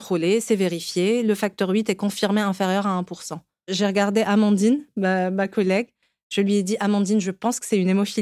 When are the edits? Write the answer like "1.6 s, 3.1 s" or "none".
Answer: none